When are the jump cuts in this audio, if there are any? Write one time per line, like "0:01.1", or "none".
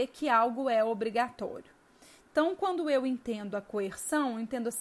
none